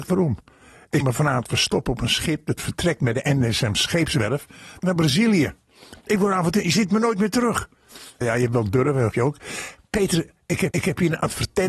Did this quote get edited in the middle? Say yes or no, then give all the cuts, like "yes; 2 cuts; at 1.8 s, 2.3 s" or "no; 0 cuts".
yes; 5 cuts; at 1.0 s, 4.8 s, 8.2 s, 9.1 s, 10.7 s